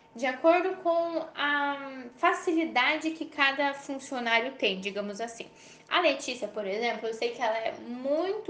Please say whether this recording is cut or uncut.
uncut